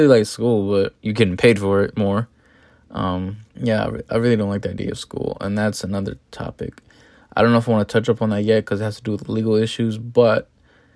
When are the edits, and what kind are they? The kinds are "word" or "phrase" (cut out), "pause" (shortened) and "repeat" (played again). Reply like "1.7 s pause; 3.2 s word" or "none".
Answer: 1.0 s pause; 3.5 s pause

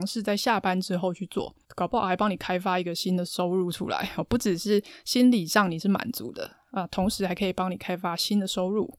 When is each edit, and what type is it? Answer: 1.6 s pause

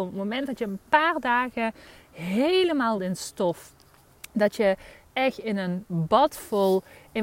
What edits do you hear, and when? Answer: 3.0 s phrase

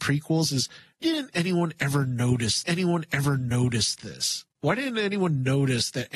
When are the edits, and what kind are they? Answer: 1.0 s word; 2.6 s repeat

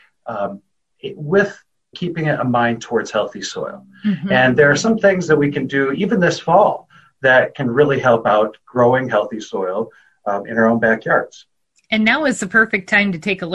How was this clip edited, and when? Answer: 1.9 s word

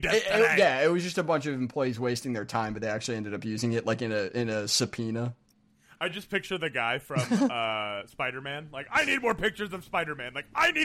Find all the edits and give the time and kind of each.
none

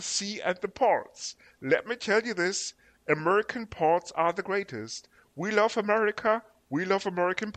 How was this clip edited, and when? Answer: none

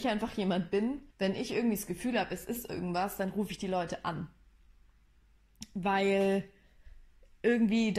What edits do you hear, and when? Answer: 1.1 s pause

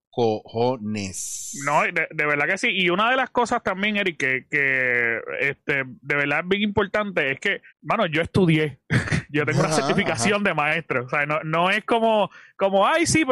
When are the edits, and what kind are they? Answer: 7.7 s pause

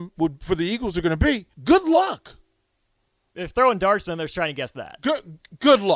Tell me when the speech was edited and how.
1.5 s pause

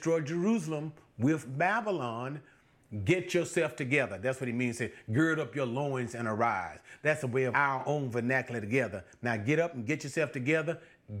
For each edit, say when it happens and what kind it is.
7.5 s phrase

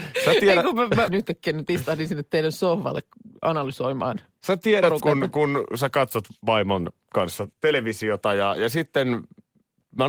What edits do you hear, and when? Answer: 1.1 s phrase; 5.0 s word; 6.4 s pause; 7.5 s pause

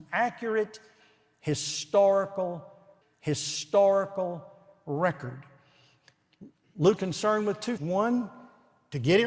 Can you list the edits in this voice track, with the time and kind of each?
3.0 s repeat; 7.0 s word; 7.8 s word

